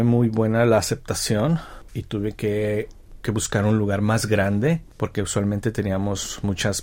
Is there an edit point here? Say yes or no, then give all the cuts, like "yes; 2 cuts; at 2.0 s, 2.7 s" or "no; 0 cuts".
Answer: yes; 1 cut; at 1.9 s